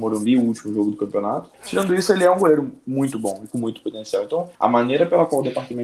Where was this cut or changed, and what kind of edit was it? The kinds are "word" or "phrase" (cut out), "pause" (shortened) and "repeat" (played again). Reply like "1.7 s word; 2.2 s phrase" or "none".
1.5 s pause; 4.5 s pause